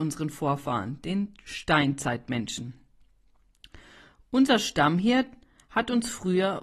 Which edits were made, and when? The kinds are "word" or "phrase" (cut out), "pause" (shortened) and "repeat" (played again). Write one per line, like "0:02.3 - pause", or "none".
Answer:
none